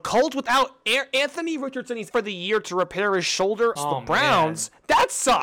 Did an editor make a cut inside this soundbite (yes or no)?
yes